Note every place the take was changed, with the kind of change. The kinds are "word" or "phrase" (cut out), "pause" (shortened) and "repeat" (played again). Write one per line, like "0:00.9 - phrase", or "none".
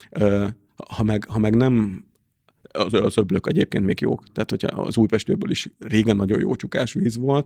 none